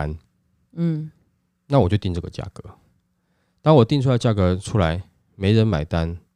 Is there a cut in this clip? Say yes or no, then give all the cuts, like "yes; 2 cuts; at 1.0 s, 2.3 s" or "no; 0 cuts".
no; 0 cuts